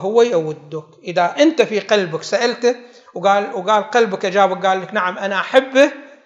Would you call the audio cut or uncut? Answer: uncut